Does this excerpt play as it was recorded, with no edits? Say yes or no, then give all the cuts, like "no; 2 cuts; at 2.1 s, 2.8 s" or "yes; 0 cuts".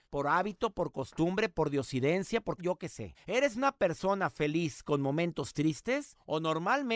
no; 1 cut; at 2.6 s